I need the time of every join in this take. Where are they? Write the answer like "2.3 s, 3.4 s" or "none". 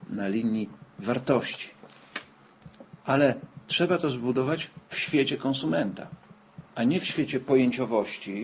6.7 s